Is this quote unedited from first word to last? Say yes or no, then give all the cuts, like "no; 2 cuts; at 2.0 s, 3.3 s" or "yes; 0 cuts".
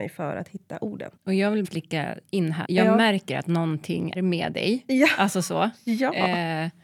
no; 4 cuts; at 1.2 s, 1.6 s, 2.6 s, 4.1 s